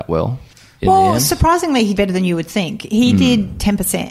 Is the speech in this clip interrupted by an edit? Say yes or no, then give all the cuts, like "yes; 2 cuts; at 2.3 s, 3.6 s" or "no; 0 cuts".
yes; 1 cut; at 2.0 s